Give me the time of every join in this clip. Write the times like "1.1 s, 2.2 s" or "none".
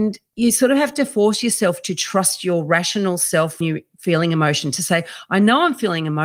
3.6 s